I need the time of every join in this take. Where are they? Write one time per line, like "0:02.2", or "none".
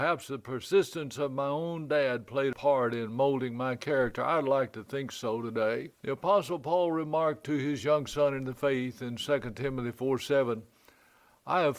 0:05.9